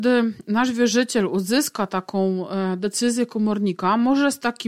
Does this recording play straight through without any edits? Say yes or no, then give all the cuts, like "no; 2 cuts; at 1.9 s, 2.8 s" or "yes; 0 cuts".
yes; 0 cuts